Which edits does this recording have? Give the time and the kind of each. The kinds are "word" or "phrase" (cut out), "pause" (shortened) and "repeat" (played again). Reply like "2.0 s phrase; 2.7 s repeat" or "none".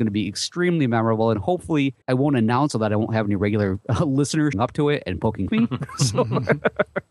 2.0 s pause; 2.7 s word; 4.5 s word; 5.5 s phrase